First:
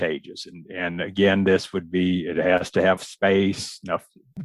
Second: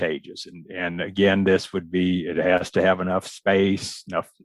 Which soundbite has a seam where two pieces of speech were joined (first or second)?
first